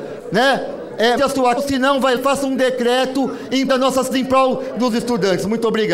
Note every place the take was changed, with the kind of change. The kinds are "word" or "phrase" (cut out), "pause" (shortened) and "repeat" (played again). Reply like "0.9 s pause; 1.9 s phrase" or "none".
1.2 s word; 1.6 s word; 2.2 s word; 3.7 s word; 4.1 s word; 4.9 s word